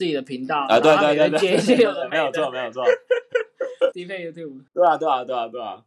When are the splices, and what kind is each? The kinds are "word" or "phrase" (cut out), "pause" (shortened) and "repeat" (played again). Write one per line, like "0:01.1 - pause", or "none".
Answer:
0:03.9 - phrase
0:04.7 - pause